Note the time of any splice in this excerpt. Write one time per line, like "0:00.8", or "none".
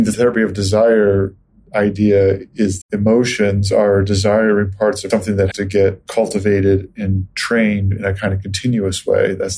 0:02.8
0:05.1
0:05.5